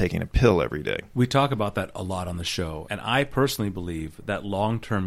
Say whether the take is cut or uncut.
uncut